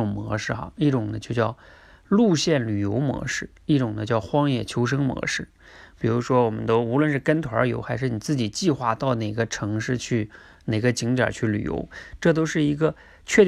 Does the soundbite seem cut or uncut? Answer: uncut